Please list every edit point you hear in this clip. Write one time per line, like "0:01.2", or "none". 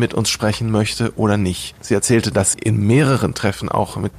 0:02.5